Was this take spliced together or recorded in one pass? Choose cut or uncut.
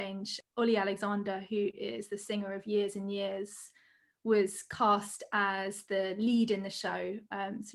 uncut